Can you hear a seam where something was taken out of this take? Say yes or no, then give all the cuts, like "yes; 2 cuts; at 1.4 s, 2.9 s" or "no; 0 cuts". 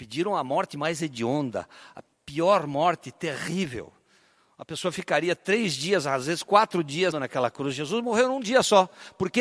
yes; 2 cuts; at 2.1 s, 7.1 s